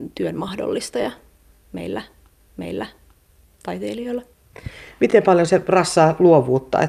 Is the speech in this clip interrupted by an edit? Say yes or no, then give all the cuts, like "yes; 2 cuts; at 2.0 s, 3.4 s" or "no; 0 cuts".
yes; 1 cut; at 2.4 s